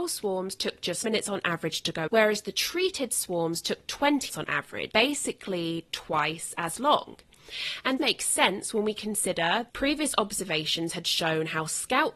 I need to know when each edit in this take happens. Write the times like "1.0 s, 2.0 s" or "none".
1.0 s, 2.1 s, 4.3 s, 4.9 s, 8.0 s, 9.7 s